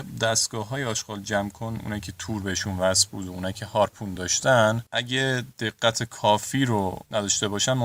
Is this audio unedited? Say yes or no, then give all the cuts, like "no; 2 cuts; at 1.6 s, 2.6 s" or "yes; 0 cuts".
yes; 0 cuts